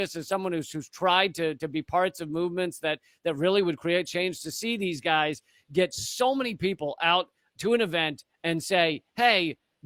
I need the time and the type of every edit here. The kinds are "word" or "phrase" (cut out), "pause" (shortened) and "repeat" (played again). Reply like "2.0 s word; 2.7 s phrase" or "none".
none